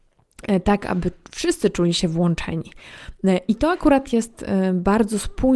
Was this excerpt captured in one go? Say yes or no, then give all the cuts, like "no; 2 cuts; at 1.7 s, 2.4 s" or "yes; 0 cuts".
yes; 0 cuts